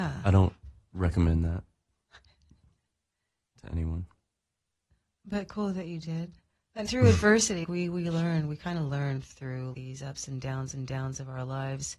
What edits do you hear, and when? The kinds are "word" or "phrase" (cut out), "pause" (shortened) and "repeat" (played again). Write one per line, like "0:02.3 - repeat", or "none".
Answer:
0:06.8 - word
0:07.6 - word
0:09.7 - word
0:10.7 - repeat